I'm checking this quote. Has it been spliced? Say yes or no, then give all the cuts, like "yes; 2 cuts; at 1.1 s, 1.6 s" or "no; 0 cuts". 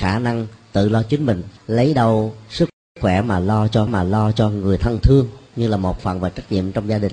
yes; 4 cuts; at 1.6 s, 3.9 s, 5.5 s, 6.0 s